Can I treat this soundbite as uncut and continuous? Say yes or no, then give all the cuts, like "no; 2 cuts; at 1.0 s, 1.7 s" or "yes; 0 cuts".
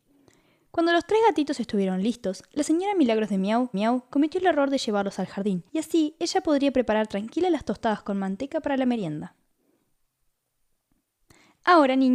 no; 2 cuts; at 3.7 s, 5.7 s